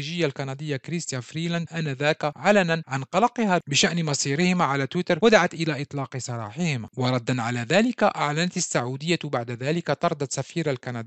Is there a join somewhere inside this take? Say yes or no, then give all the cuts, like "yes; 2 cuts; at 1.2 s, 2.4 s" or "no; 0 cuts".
no; 0 cuts